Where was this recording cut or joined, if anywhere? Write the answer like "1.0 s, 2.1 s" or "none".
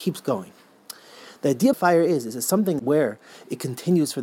1.7 s, 2.8 s